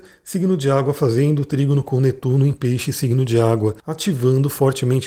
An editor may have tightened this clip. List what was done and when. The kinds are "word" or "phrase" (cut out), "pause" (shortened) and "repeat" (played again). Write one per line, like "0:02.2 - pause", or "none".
0:03.8 - pause